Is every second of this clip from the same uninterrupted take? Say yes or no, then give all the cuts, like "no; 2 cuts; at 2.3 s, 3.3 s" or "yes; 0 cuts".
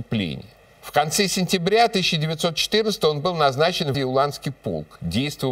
no; 1 cut; at 3.9 s